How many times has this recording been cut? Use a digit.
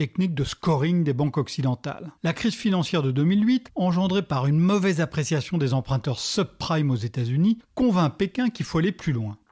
1